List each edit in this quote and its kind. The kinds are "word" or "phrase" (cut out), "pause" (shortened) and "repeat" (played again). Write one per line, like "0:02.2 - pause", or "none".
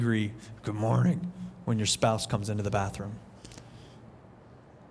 none